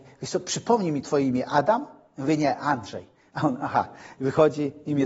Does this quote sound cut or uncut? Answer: uncut